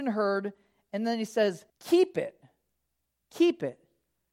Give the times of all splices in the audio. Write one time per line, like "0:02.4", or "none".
0:01.7